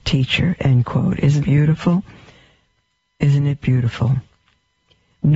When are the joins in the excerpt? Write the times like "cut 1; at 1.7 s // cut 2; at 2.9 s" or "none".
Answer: cut 1; at 1.4 s